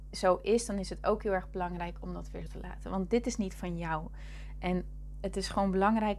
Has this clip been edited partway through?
yes; 1 cut; at 2.5 s

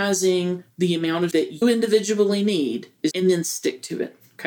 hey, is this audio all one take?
no; 3 cuts; at 1.3 s, 1.6 s, 3.1 s

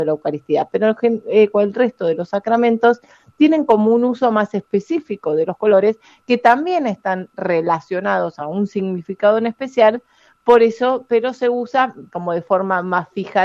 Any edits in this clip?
no; 0 cuts

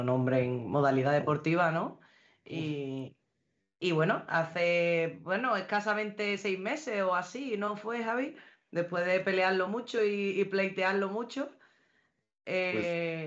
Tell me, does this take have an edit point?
no; 0 cuts

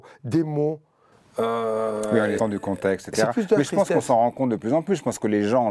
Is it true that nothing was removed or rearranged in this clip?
no; 1 cut; at 2.4 s

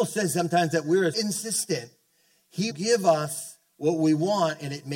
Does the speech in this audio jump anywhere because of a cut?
yes; 2 cuts; at 1.1 s, 2.7 s

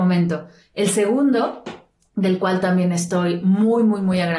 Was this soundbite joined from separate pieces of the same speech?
no; 0 cuts

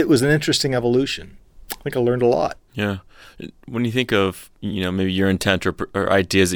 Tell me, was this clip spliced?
no; 0 cuts

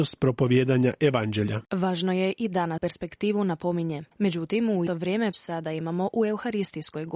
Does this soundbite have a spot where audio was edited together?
yes; 5 cuts; at 1.7 s, 2.8 s, 4.1 s, 4.9 s, 5.3 s

